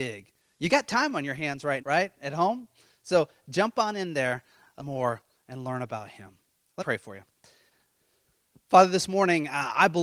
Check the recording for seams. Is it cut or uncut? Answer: cut